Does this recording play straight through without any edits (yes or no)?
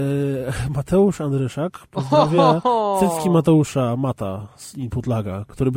yes